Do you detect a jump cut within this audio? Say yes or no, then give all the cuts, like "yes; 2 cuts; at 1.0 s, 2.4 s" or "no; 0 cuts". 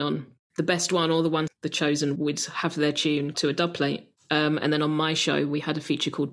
yes; 3 cuts; at 1.5 s, 2.2 s, 3.3 s